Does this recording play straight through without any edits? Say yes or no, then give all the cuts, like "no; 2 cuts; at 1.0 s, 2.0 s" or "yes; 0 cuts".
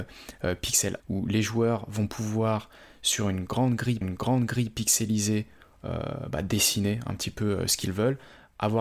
no; 2 cuts; at 1.0 s, 4.0 s